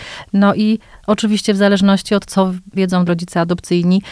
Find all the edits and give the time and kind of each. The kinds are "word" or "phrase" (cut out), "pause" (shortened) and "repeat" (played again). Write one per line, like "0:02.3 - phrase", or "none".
0:02.3 - word
0:02.7 - word
0:03.1 - word